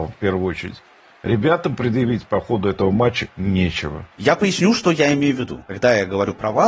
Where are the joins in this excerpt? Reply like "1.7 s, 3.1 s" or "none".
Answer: 4.1 s